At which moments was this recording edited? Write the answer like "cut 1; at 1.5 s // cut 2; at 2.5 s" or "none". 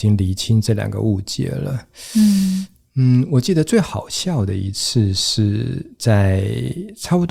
none